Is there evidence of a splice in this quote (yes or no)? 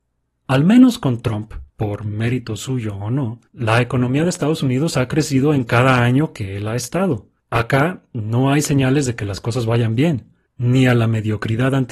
yes